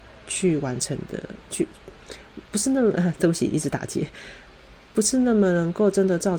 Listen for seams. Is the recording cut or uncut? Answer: uncut